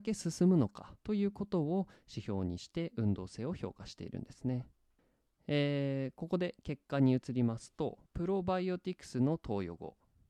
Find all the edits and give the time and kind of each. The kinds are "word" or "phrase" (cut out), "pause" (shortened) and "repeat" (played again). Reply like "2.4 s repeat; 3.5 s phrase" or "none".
1.0 s pause; 5.0 s pause; 8.1 s pause